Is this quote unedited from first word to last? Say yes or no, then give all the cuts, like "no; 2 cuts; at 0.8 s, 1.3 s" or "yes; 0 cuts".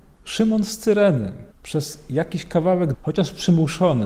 no; 2 cuts; at 1.5 s, 2.9 s